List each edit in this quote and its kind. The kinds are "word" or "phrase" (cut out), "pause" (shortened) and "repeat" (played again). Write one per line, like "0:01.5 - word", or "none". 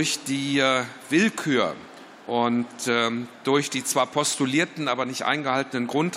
none